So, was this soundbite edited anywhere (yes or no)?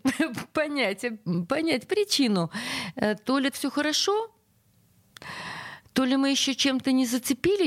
yes